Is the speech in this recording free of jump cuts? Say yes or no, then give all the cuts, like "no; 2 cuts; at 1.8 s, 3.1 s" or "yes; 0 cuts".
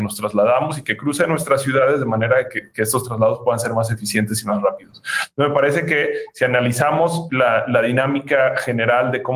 yes; 0 cuts